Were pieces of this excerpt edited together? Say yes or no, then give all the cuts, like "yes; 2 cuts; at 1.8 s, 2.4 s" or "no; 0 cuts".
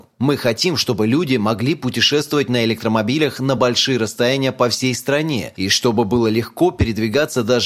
no; 0 cuts